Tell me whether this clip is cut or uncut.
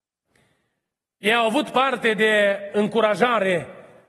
uncut